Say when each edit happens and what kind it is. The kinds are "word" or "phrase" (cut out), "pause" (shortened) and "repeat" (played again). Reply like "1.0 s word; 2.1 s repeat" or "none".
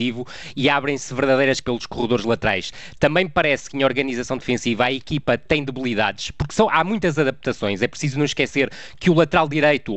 1.6 s word

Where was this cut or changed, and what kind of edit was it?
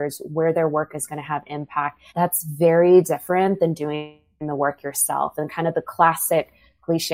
2.1 s pause

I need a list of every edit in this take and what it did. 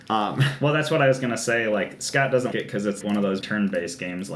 2.5 s word; 3.0 s word; 3.4 s word

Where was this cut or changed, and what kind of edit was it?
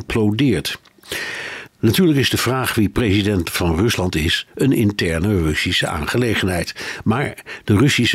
none

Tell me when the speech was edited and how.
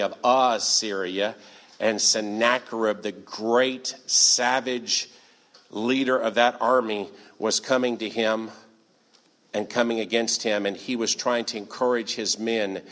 none

